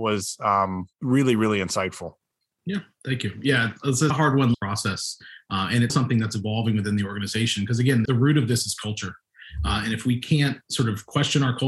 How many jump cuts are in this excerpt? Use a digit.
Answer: 6